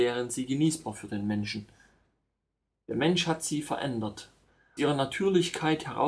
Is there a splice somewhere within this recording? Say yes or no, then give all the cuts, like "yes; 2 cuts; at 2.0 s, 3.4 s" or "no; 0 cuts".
yes; 1 cut; at 4.8 s